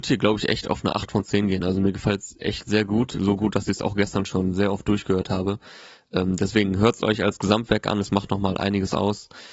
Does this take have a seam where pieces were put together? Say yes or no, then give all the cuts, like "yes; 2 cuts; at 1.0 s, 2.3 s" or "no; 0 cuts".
no; 0 cuts